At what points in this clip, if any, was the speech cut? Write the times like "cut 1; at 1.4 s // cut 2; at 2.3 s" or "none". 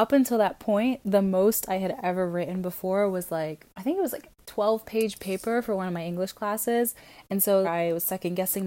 cut 1; at 3.7 s // cut 2; at 7.6 s